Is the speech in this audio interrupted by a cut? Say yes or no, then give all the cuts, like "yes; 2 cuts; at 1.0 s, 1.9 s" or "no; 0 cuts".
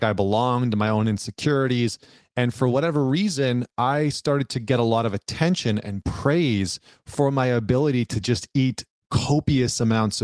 no; 0 cuts